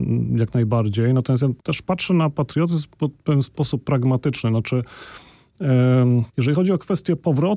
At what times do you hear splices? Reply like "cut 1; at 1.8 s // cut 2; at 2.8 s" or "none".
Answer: cut 1; at 1.6 s // cut 2; at 6.3 s